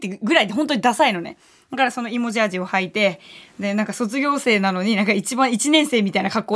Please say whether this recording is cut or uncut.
uncut